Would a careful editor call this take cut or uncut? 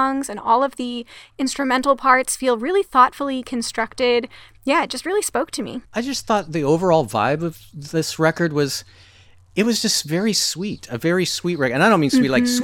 cut